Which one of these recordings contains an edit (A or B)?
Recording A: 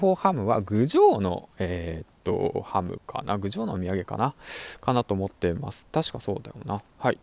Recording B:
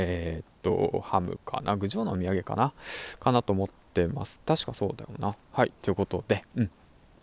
A